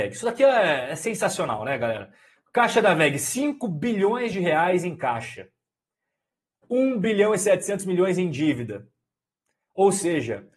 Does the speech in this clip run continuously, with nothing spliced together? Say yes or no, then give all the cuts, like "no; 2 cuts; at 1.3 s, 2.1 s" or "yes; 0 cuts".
yes; 0 cuts